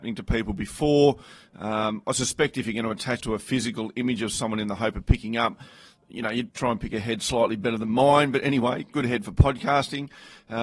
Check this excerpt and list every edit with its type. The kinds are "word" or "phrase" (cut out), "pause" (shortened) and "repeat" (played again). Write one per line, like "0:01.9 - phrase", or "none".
0:03.2 - word
0:06.5 - word